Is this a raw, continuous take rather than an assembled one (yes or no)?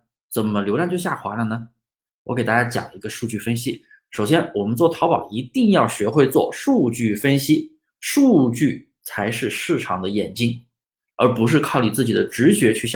yes